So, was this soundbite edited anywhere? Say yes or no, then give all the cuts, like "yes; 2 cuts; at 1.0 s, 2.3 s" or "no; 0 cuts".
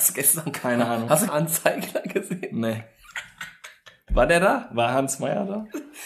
yes; 1 cut; at 1.3 s